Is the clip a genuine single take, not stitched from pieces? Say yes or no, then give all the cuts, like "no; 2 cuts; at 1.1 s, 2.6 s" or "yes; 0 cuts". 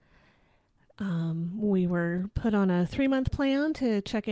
yes; 0 cuts